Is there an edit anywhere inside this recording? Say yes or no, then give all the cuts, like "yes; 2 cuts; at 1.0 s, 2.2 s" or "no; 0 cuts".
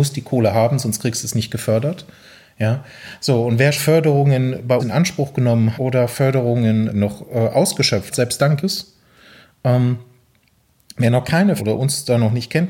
yes; 7 cuts; at 3.8 s, 4.8 s, 5.7 s, 6.9 s, 8.1 s, 8.6 s, 11.6 s